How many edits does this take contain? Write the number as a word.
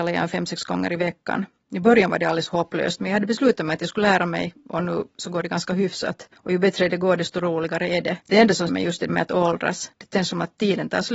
five